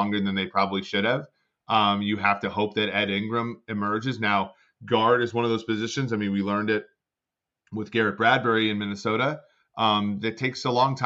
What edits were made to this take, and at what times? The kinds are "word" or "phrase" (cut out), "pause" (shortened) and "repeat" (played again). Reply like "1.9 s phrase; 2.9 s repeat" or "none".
none